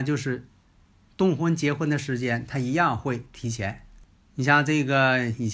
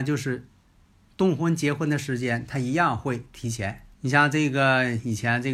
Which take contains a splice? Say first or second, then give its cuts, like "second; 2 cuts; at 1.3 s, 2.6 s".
second; 1 cut; at 3.9 s